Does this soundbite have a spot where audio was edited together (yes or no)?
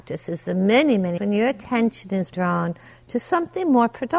yes